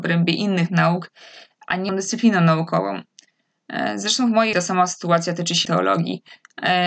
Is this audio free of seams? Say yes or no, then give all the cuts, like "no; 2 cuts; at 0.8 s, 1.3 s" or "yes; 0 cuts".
no; 3 cuts; at 1.9 s, 4.5 s, 5.6 s